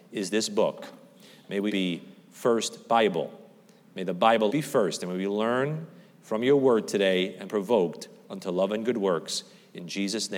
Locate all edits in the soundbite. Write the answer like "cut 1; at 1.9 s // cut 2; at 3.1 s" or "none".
cut 1; at 1.7 s // cut 2; at 4.5 s // cut 3; at 7.5 s